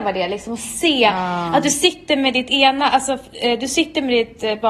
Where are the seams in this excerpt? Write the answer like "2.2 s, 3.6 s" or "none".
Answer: none